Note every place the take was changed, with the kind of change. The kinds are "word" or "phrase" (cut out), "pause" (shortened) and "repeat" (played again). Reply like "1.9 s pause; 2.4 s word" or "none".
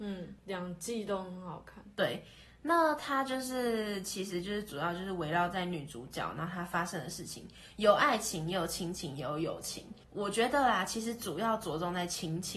10.0 s pause